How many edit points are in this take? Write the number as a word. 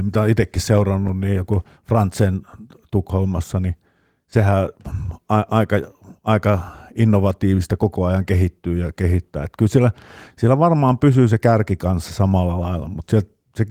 zero